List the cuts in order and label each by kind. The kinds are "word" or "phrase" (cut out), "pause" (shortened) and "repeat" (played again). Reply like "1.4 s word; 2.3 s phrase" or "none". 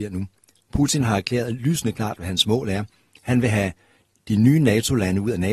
none